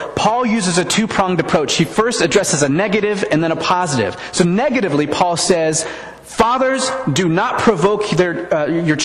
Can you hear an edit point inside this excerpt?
no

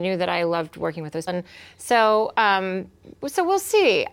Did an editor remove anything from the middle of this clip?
yes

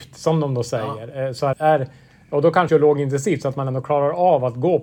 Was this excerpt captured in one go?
no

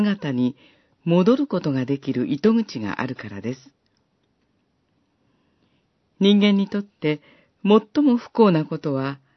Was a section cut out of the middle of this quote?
no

